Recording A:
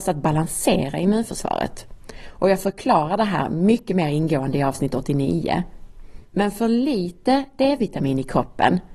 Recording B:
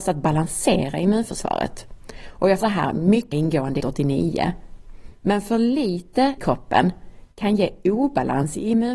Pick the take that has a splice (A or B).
B